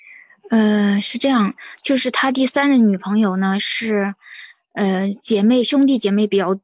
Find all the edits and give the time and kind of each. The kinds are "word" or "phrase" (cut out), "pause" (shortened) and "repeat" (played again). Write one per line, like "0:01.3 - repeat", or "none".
none